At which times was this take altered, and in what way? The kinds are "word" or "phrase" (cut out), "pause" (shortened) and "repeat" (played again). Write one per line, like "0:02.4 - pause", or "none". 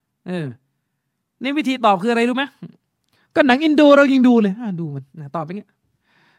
0:05.1 - pause